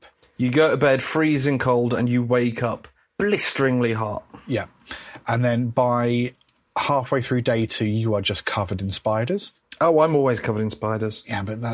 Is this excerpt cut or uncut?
uncut